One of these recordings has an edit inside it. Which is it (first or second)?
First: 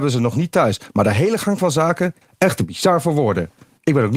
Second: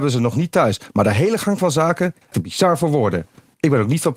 second